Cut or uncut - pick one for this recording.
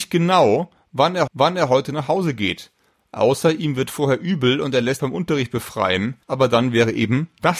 cut